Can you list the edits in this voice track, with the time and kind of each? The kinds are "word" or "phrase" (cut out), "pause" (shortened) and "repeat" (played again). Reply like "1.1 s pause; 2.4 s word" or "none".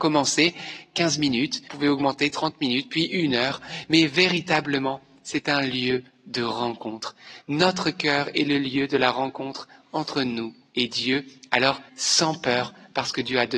1.7 s phrase; 11.9 s word